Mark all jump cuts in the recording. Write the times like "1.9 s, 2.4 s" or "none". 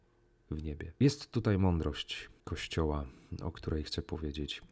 1.0 s, 2.4 s